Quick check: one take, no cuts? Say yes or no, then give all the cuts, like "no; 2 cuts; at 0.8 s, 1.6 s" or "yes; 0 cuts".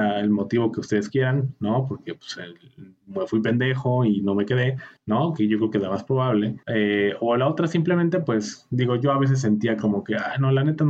no; 2 cuts; at 5.0 s, 6.6 s